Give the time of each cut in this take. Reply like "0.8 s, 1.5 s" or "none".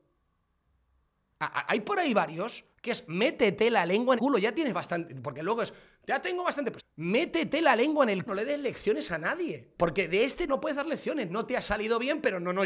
2.7 s, 4.2 s, 6.8 s, 8.3 s, 9.7 s, 10.5 s